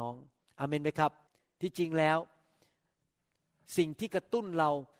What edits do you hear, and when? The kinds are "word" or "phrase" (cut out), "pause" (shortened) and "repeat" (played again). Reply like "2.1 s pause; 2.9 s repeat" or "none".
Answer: 1.3 s pause